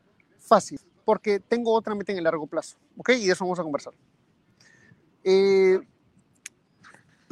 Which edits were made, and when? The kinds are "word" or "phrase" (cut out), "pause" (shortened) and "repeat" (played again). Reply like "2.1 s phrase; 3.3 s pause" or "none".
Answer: none

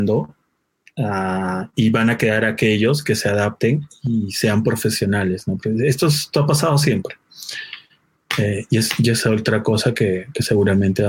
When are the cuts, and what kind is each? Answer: none

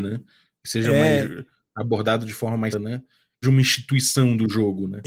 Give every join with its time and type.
2.7 s word; 3.4 s word

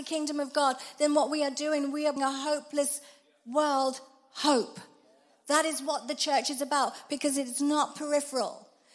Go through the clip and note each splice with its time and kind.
2.2 s word

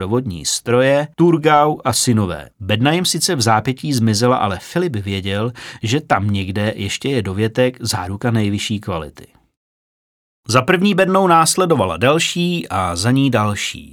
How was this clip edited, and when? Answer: 1.1 s pause; 2.5 s pause

